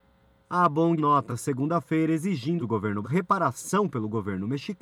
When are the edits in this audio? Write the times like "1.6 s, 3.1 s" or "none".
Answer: 1.0 s, 1.3 s, 2.6 s, 3.0 s